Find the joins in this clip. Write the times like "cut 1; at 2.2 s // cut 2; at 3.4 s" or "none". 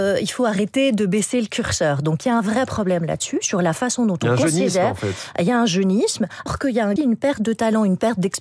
cut 1; at 6.5 s // cut 2; at 7.0 s